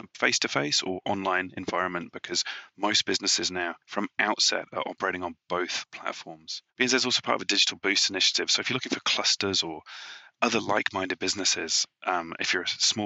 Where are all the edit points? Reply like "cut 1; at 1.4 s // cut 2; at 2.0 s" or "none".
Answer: cut 1; at 3.8 s // cut 2; at 6.7 s